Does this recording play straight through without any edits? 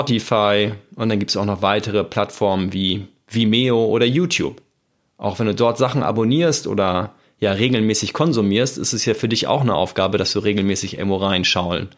no; 1 cut; at 5.0 s

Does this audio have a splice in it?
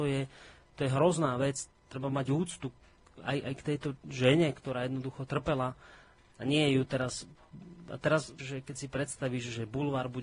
yes; 2 cuts; at 3.4 s, 8.4 s

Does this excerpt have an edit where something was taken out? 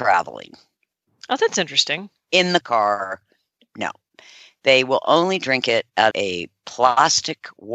yes; 2 cuts; at 2.6 s, 6.1 s

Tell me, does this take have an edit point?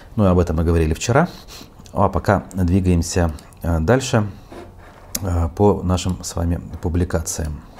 no; 0 cuts

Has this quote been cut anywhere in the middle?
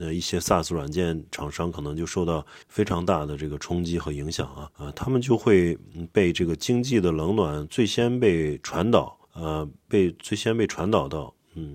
yes; 3 cuts; at 2.6 s, 4.7 s, 9.2 s

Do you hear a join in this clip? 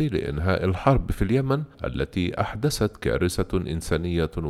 yes; 1 cut; at 1.7 s

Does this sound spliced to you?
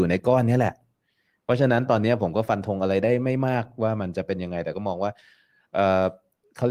no; 0 cuts

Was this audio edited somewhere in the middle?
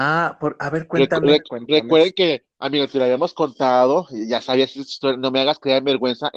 no; 0 cuts

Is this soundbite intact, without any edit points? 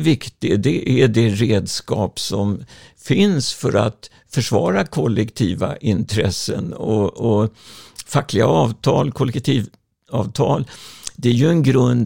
yes; 0 cuts

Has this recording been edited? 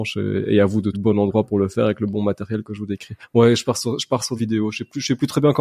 yes; 2 cuts; at 0.9 s, 4.4 s

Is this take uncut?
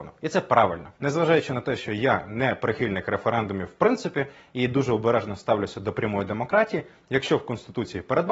no; 1 cut; at 0.9 s

